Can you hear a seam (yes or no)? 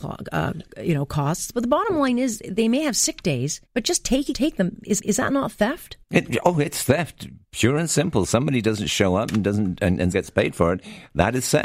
yes